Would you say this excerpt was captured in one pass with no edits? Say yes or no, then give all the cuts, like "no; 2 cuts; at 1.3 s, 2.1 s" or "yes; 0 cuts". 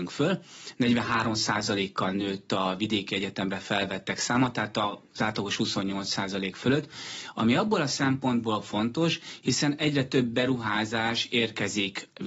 yes; 0 cuts